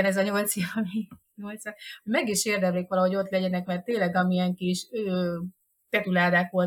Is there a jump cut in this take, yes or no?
no